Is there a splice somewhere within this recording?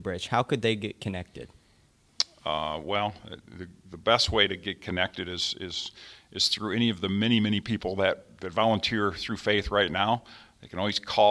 no; 0 cuts

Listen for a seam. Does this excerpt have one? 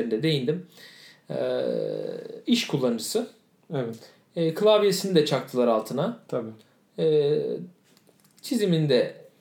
no; 0 cuts

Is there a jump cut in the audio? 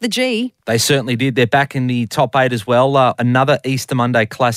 yes; 1 cut; at 3.1 s

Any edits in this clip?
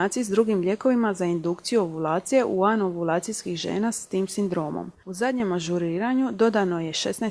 no; 0 cuts

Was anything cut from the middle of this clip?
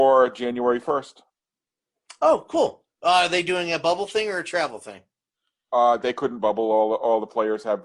no; 0 cuts

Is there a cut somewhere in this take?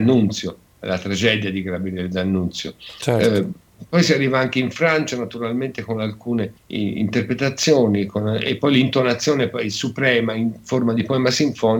yes; 1 cut; at 6.6 s

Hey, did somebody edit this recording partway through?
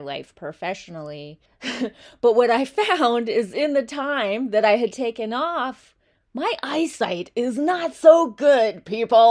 yes; 1 cut; at 1.5 s

